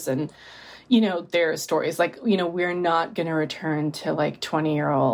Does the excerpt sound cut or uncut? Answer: uncut